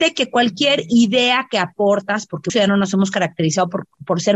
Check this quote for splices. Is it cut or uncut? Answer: cut